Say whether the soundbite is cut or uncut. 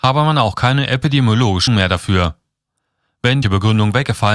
cut